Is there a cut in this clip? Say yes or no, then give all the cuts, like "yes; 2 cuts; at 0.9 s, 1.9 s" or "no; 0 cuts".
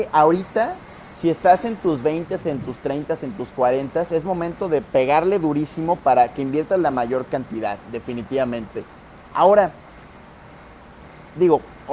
no; 0 cuts